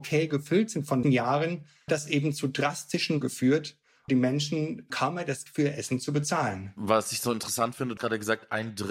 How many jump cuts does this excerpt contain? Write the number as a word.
seven